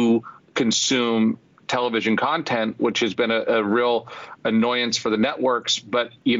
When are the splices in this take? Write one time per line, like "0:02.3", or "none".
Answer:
none